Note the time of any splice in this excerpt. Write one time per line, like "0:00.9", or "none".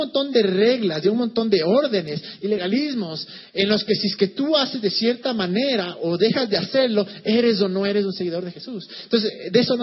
none

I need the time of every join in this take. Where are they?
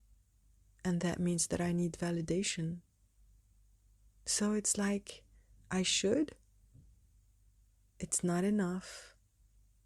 none

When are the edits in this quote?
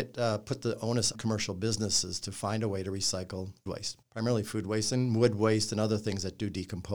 0:01.1
0:03.7
0:04.0

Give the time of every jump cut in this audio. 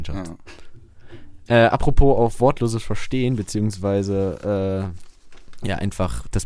none

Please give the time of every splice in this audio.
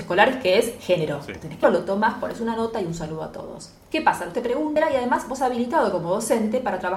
0:01.6
0:04.3
0:05.4

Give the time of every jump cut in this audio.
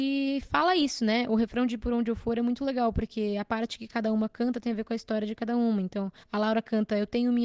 0:06.2

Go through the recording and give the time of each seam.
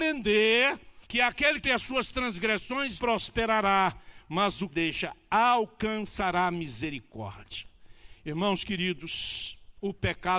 0:01.0
0:01.6
0:03.0
0:04.7

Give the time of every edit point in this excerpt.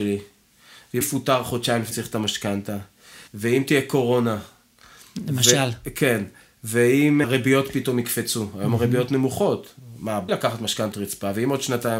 0:01.0
0:01.9
0:03.3
0:07.2
0:10.3
0:10.9

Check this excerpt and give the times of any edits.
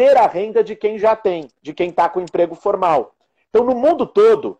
none

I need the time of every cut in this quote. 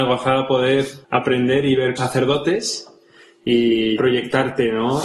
0:01.0
0:02.0
0:04.0

